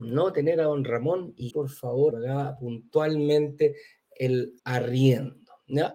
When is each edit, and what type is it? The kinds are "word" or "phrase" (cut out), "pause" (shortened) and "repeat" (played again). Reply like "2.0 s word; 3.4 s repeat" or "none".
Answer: 1.5 s word; 2.1 s phrase; 4.6 s pause